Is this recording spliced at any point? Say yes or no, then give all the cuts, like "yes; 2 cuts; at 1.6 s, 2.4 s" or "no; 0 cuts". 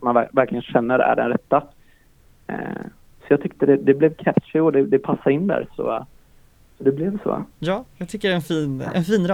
no; 0 cuts